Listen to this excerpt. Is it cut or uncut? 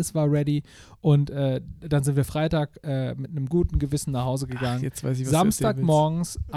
cut